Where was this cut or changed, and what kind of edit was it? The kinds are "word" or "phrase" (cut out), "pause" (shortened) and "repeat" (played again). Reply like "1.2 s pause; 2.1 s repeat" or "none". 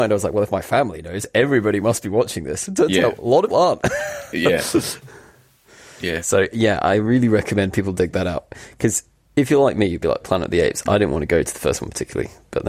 3.5 s word; 10.2 s word